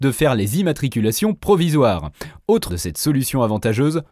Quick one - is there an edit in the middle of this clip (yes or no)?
yes